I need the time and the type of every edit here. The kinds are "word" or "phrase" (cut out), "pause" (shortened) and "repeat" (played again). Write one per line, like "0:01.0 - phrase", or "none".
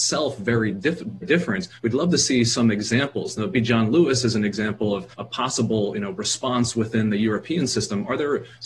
0:01.2 - word
0:01.8 - pause
0:03.5 - word
0:05.1 - pause